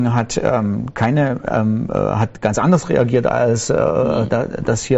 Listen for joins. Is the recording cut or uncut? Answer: uncut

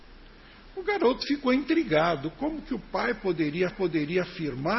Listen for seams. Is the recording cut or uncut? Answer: cut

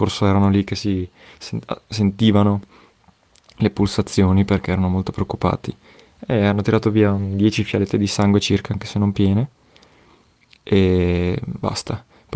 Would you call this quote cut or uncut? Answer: uncut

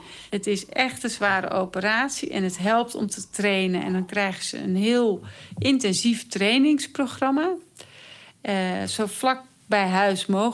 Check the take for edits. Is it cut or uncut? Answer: uncut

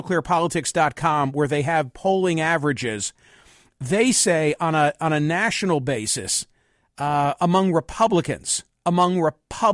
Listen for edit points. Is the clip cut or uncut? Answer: uncut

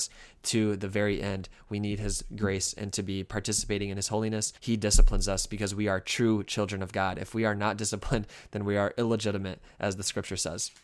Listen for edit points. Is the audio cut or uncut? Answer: cut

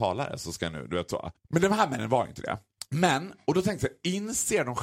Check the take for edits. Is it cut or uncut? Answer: uncut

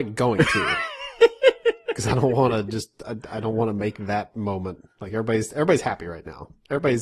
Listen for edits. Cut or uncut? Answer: uncut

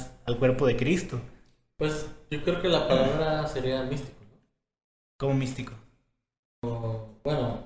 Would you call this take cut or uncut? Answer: uncut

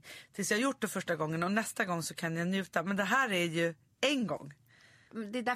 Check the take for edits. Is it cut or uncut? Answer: uncut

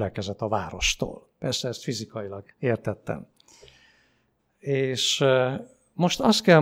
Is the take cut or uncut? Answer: cut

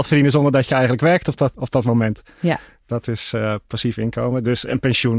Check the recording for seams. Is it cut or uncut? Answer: cut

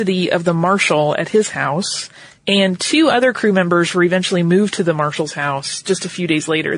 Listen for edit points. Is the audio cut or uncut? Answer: uncut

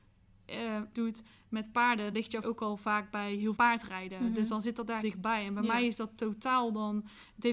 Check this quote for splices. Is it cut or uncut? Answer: cut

